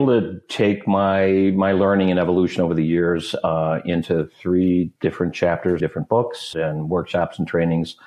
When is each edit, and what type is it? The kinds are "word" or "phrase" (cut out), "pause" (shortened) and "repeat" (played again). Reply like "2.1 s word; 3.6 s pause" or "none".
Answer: 5.0 s pause; 5.8 s phrase; 6.5 s word